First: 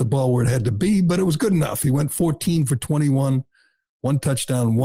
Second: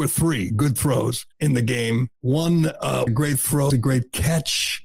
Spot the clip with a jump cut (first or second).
second